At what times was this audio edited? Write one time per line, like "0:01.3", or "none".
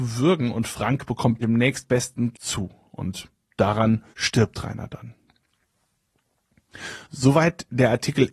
0:01.4
0:02.3
0:04.1
0:07.0